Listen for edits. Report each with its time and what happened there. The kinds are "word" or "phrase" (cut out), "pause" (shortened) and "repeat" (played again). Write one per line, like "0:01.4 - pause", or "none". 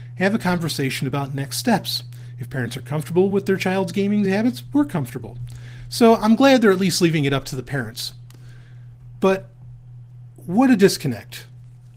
none